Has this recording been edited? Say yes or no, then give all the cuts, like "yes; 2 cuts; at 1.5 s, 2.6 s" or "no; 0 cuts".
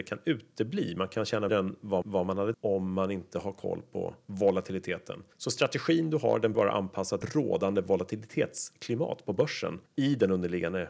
yes; 7 cuts; at 1.5 s, 2.0 s, 2.5 s, 5.3 s, 6.5 s, 7.2 s, 9.9 s